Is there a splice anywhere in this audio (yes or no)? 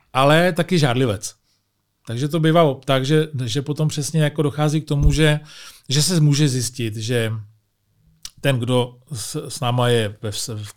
no